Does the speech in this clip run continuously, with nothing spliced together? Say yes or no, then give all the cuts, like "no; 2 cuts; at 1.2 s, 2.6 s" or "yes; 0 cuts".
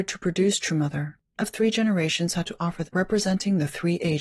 no; 2 cuts; at 1.4 s, 2.9 s